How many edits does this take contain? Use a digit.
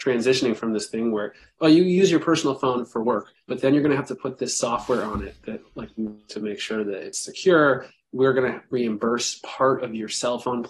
1